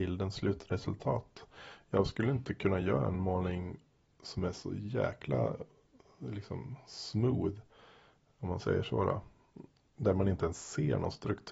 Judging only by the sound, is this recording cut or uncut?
uncut